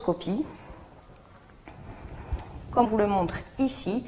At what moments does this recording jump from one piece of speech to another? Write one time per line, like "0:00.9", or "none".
0:02.8